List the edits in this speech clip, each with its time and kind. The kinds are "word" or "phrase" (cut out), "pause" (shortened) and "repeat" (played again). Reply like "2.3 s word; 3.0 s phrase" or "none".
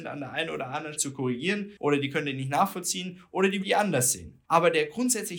1.0 s word; 1.8 s pause; 3.6 s word; 4.5 s pause

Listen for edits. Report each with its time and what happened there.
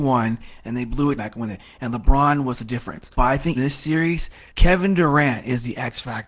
1.2 s phrase; 3.1 s pause; 3.6 s word; 4.5 s pause

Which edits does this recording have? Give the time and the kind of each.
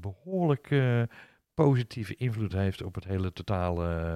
none

